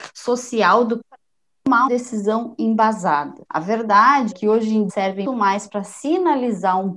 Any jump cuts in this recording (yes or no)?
yes